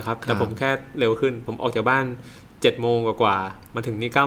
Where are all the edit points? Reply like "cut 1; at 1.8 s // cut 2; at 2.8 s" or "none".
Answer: none